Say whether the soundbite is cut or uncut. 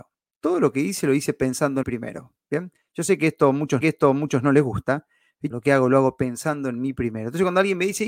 cut